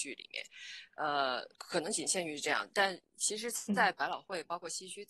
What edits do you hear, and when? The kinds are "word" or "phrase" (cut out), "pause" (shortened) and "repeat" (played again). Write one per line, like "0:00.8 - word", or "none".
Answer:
0:01.5 - pause